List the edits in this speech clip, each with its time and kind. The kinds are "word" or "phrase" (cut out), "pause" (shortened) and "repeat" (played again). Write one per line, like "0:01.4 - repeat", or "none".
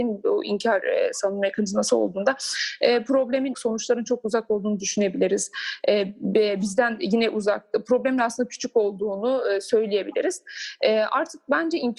0:03.5 - phrase